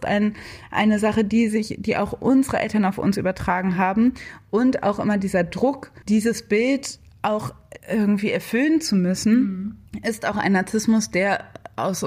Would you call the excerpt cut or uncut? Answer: cut